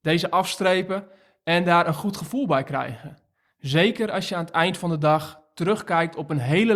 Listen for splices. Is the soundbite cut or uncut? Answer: uncut